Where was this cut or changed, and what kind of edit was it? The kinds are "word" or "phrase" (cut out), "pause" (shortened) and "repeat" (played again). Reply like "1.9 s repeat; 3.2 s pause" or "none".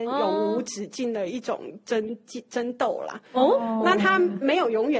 none